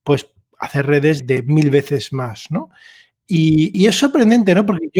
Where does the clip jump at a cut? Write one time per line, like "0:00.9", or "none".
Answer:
0:01.2
0:03.7